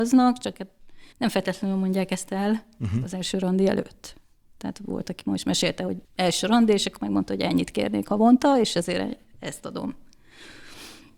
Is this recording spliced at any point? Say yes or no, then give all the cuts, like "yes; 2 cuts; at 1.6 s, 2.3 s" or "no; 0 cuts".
yes; 2 cuts; at 1.1 s, 6.0 s